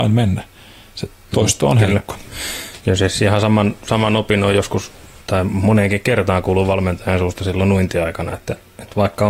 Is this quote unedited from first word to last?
yes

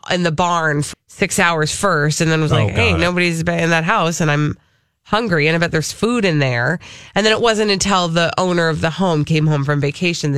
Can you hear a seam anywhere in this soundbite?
yes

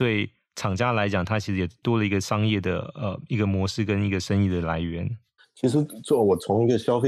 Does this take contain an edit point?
yes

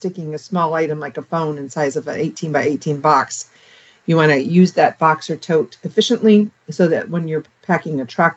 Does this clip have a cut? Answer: no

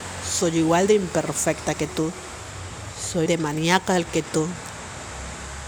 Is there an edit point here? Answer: yes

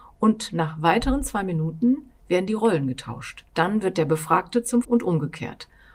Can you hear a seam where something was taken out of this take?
yes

